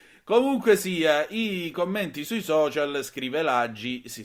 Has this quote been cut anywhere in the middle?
no; 0 cuts

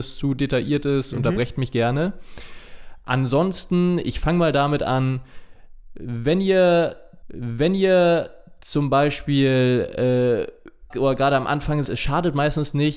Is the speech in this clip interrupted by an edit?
yes; 3 cuts; at 7.2 s, 10.9 s, 11.9 s

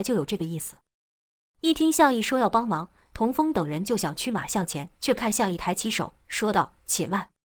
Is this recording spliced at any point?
yes; 1 cut; at 5.0 s

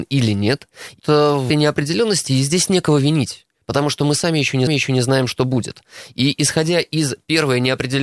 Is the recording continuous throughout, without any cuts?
no; 3 cuts; at 1.0 s, 1.5 s, 4.7 s

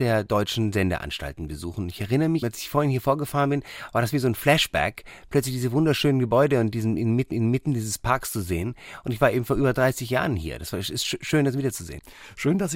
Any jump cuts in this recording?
yes; 2 cuts; at 2.4 s, 7.3 s

